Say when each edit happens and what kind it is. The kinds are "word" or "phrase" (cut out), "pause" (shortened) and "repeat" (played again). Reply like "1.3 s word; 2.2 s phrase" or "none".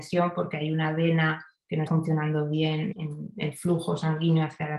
1.9 s word; 2.9 s word